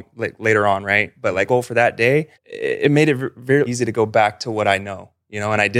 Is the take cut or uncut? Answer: cut